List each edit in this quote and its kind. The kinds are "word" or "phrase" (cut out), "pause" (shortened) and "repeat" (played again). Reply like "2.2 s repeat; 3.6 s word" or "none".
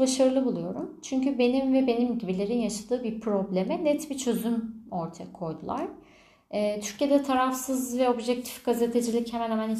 none